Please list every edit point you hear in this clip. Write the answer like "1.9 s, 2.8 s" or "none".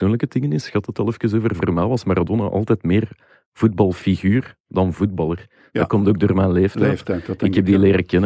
0.9 s